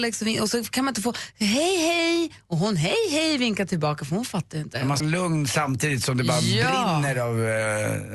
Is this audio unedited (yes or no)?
no